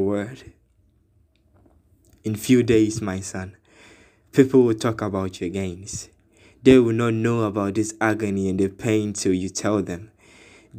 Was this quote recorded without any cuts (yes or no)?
yes